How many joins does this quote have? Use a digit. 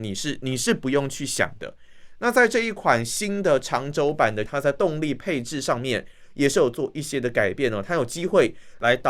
1